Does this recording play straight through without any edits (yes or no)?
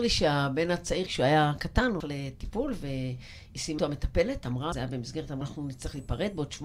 no